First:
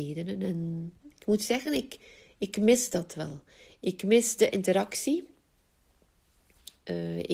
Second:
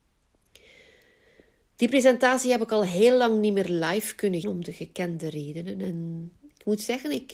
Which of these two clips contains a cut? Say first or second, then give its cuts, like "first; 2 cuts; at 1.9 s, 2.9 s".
second; 1 cut; at 4.4 s